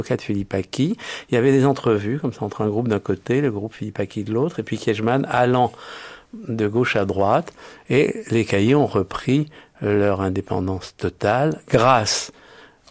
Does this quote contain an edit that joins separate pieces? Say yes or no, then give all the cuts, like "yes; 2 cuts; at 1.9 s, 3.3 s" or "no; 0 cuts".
no; 0 cuts